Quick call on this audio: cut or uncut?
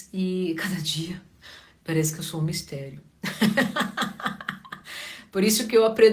uncut